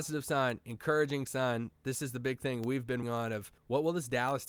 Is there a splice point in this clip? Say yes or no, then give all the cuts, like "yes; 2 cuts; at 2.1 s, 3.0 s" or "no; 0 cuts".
yes; 2 cuts; at 3.0 s, 3.6 s